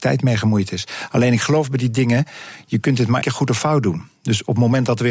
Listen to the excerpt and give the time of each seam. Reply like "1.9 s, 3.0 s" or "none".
3.2 s

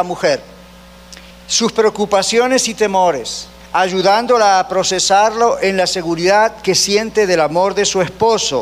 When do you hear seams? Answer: 1.3 s, 3.6 s

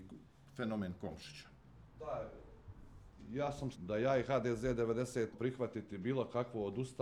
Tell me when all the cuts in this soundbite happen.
1.9 s, 3.7 s, 5.3 s

